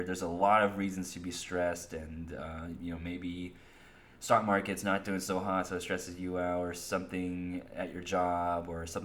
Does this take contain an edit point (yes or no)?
no